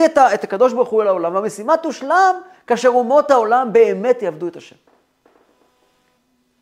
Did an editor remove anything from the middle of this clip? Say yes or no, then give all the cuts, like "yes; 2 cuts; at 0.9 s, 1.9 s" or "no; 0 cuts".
no; 0 cuts